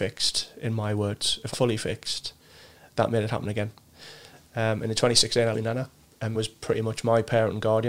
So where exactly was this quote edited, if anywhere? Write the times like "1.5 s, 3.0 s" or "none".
1.5 s, 5.5 s, 6.0 s, 6.3 s